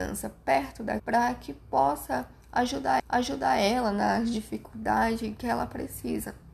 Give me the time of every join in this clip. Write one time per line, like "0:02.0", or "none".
0:01.0
0:03.0